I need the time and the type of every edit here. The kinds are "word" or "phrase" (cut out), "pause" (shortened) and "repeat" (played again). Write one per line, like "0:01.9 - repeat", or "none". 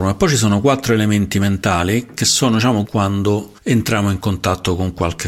0:02.8 - phrase
0:03.6 - pause